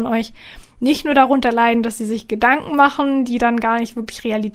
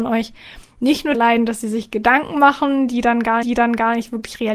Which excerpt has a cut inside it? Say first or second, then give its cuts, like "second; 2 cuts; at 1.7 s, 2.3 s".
second; 2 cuts; at 1.1 s, 3.4 s